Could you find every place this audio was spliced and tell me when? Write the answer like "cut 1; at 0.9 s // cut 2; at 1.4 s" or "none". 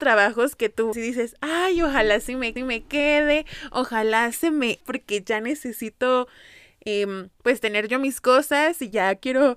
cut 1; at 0.9 s // cut 2; at 2.6 s // cut 3; at 4.3 s // cut 4; at 4.8 s // cut 5; at 7.3 s